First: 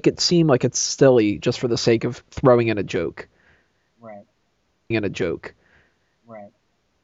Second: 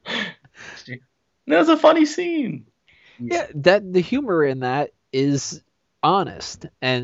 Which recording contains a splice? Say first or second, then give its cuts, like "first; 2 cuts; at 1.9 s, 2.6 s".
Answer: first; 1 cut; at 4.9 s